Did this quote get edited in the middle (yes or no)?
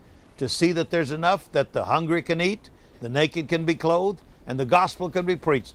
no